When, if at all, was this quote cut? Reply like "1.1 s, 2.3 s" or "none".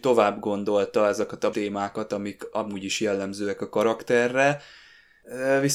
1.5 s